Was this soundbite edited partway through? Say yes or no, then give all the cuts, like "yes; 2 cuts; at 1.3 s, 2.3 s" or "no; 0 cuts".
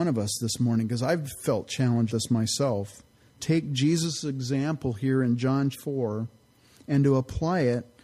yes; 3 cuts; at 2.1 s, 3.4 s, 5.7 s